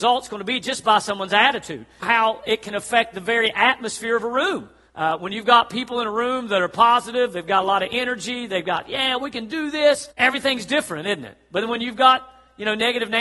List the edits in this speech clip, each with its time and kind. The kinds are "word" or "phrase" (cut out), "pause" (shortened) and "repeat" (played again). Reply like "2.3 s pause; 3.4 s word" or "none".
2.0 s phrase; 4.9 s pause; 10.1 s pause